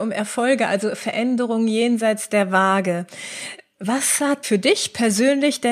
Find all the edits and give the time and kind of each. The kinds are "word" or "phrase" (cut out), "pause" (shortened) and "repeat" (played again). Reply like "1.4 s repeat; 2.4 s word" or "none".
4.4 s word